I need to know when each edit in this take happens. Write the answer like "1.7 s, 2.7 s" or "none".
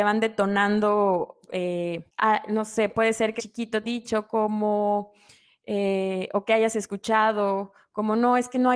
1.5 s, 2.1 s, 3.4 s, 3.8 s